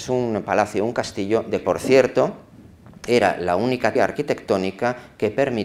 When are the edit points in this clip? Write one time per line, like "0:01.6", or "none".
0:01.6
0:04.0